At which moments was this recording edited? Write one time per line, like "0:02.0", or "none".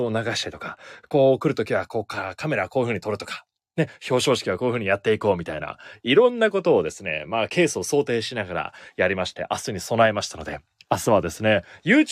none

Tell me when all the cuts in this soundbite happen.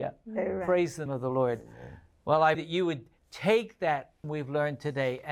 0:01.1
0:02.5
0:04.2

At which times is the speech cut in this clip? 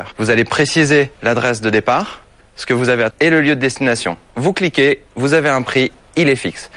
0:01.2
0:02.4
0:03.1

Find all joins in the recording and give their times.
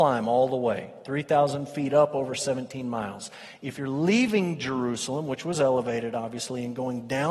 none

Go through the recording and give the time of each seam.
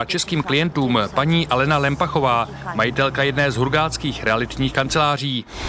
none

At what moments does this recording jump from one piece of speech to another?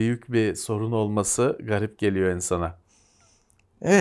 none

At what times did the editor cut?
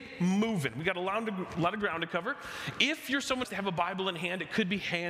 0:03.4

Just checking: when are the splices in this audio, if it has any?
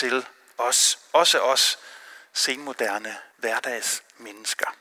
0:03.3

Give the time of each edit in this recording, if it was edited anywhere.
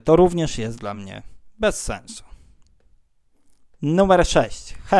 none

